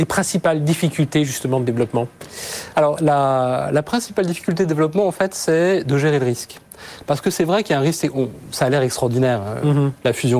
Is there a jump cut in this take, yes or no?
yes